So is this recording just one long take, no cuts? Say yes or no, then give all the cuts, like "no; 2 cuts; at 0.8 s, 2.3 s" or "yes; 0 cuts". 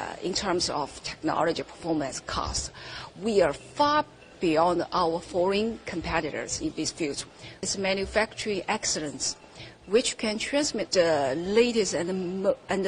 yes; 0 cuts